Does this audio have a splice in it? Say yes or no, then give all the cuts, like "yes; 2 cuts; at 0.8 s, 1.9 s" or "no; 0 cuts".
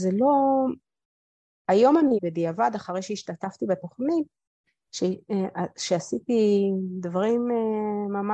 yes; 1 cut; at 2.2 s